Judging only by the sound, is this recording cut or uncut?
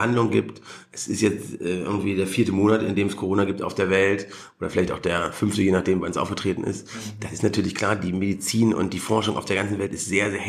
uncut